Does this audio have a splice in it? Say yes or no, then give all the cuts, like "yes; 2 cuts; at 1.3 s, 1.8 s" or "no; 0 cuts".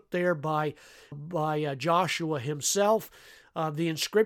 yes; 1 cut; at 1.1 s